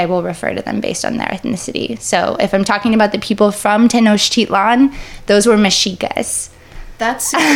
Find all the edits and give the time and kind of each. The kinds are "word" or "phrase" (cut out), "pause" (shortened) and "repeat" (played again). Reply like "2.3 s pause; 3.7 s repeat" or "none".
none